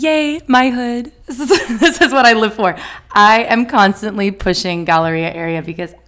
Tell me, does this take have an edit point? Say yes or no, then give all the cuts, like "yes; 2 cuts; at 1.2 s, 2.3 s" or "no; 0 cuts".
yes; 1 cut; at 1.2 s